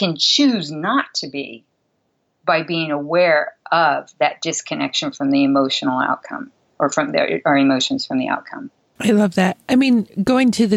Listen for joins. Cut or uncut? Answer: uncut